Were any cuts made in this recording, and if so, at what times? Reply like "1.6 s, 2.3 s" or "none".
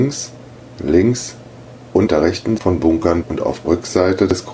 2.1 s, 2.6 s, 3.2 s, 3.6 s

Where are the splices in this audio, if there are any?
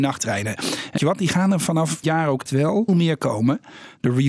1.0 s, 2.0 s, 2.5 s, 2.9 s

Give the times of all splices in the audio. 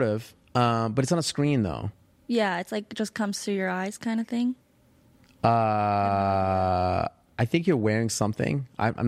none

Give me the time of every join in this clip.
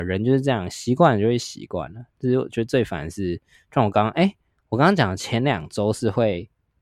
none

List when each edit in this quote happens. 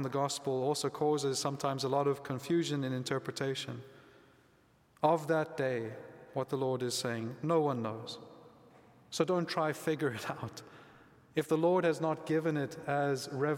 none

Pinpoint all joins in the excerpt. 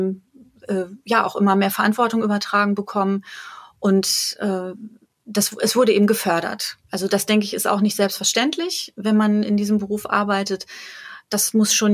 6.8 s

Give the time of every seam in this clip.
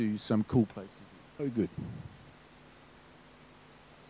1.4 s

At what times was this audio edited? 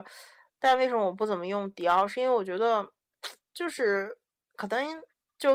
3.4 s, 4.3 s

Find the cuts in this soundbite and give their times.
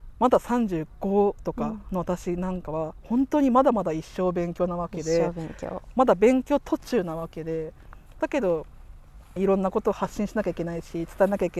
9.4 s

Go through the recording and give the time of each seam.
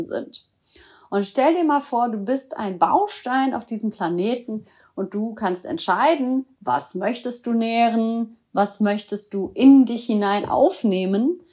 none

